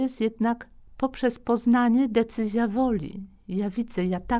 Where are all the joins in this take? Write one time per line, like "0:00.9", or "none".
none

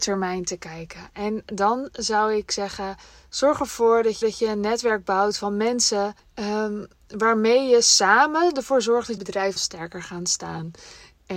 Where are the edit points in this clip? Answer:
0:04.2
0:06.2
0:09.2
0:09.6

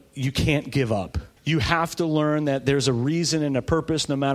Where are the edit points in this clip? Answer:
0:01.4

